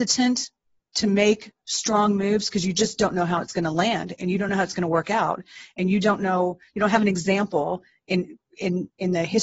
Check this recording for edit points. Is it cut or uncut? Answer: uncut